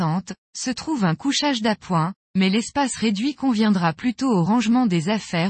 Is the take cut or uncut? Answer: uncut